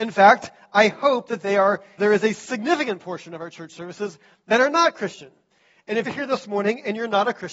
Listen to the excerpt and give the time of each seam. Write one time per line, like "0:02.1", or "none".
0:02.0
0:06.1

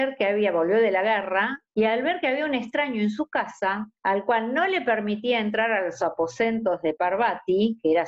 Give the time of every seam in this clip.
0:01.6
0:04.0

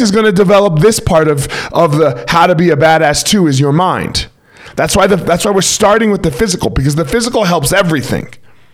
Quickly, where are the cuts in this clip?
none

